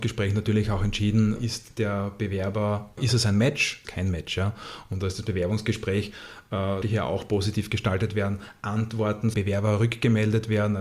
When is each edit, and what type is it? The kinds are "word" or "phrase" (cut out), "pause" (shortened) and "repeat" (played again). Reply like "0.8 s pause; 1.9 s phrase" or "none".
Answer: 1.4 s word; 3.0 s word; 3.8 s phrase; 6.8 s word; 9.3 s phrase